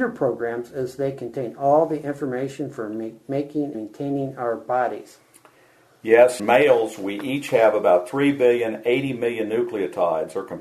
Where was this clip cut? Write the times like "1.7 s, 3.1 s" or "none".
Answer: 3.7 s, 6.4 s